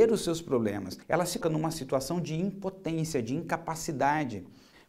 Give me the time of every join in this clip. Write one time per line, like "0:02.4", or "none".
0:01.0
0:01.4